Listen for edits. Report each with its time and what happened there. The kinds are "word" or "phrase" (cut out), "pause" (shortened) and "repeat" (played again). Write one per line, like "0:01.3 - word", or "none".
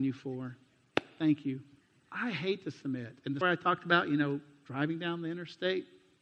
0:01.8 - pause
0:03.4 - word

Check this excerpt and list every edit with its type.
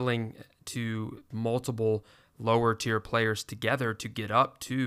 0:01.3 - word

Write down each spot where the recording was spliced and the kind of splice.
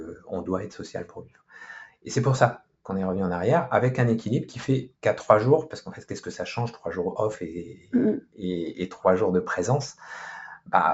0:05.0 - pause

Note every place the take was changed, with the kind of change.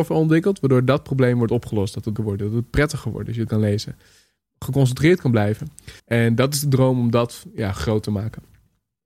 0:02.2 - word
0:03.5 - phrase
0:06.0 - pause

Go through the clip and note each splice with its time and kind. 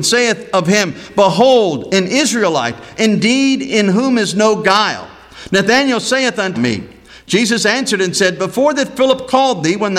0:06.5 - phrase

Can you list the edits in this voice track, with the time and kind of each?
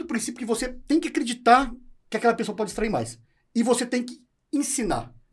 none

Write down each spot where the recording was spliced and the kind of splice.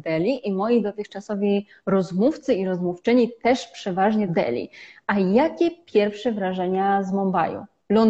0:04.3 - phrase

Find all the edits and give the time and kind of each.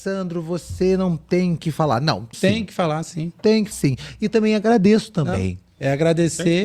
0:02.3 - word
0:03.7 - word

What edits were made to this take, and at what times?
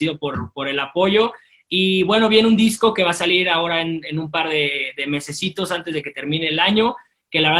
none

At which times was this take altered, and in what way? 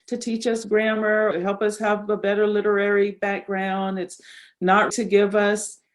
0:01.3 - word
0:04.9 - word

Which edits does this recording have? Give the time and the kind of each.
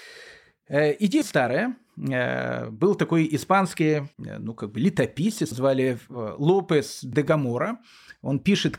0:01.2 - word
0:04.1 - pause
0:05.5 - word

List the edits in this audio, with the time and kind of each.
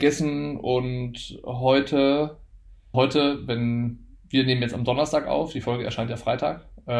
0:02.9 - word

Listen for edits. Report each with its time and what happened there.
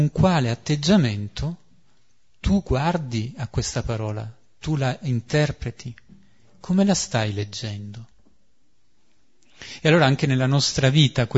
none

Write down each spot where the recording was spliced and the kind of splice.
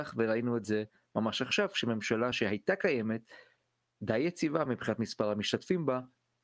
none

